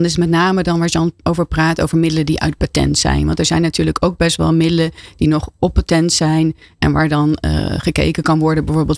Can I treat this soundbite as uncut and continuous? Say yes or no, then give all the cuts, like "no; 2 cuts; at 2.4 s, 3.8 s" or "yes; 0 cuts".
yes; 0 cuts